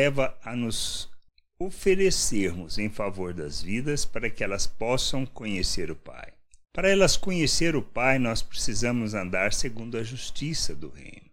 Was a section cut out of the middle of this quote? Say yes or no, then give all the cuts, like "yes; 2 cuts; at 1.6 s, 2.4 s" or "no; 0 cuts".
no; 0 cuts